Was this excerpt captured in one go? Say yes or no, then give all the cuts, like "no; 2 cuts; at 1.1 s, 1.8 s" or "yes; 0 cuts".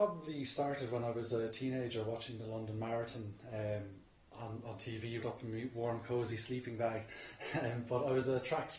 no; 1 cut; at 5.2 s